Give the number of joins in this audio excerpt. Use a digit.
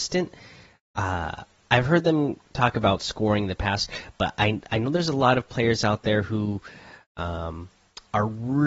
0